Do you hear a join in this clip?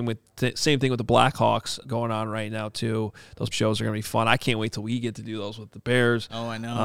yes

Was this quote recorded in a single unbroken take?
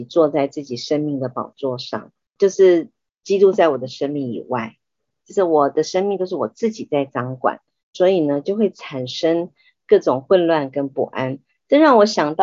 yes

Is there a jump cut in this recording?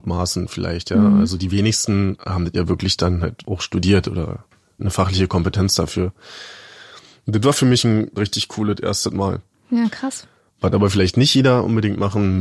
no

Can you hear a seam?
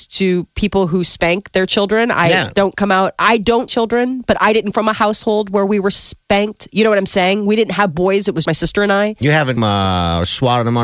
yes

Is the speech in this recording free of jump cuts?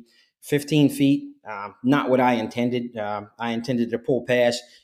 yes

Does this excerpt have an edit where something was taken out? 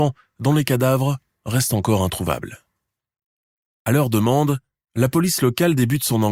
no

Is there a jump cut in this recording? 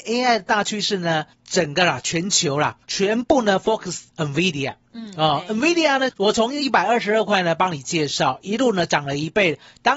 yes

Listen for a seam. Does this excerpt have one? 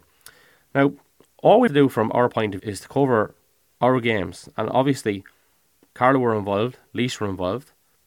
yes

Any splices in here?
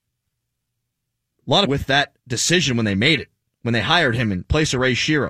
yes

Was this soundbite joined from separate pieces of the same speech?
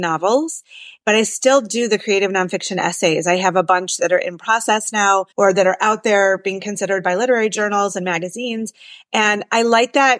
yes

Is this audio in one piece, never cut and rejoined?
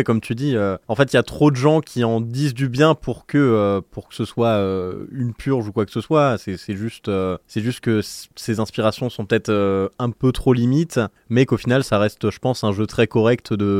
yes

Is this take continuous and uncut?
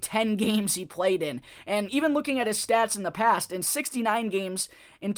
yes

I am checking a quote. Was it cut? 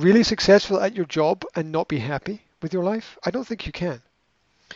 no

